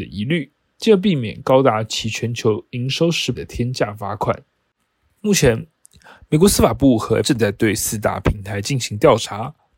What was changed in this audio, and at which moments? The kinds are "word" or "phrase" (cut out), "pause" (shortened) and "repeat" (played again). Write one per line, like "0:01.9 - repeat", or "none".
0:03.3 - word
0:07.2 - word

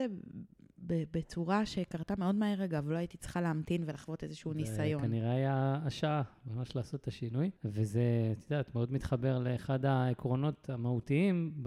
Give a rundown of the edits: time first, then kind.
0:07.6 - pause

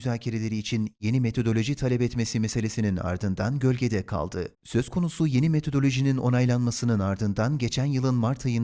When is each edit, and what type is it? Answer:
0:04.5 - pause

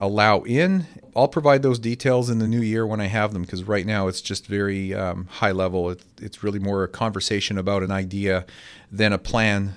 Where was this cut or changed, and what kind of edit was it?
none

